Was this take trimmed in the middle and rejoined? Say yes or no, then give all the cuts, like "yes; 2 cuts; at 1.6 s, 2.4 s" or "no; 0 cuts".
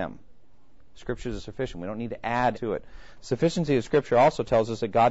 yes; 1 cut; at 2.5 s